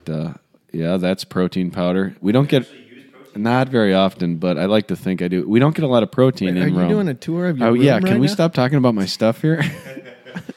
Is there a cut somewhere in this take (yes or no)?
no